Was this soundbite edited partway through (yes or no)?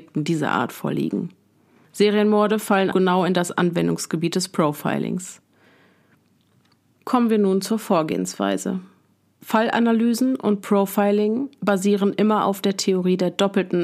yes